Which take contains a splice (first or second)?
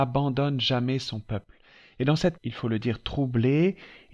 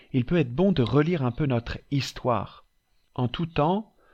first